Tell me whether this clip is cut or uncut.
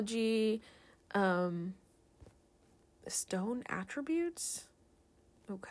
uncut